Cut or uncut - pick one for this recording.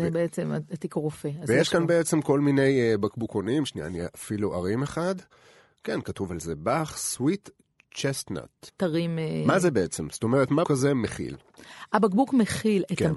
cut